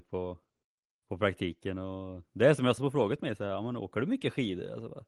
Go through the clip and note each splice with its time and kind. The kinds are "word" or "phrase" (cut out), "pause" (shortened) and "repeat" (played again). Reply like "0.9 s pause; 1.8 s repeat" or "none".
2.8 s phrase